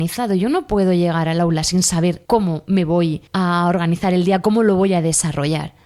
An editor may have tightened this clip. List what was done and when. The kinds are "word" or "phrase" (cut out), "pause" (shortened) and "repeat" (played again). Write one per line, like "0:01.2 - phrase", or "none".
0:02.3 - pause
0:03.3 - pause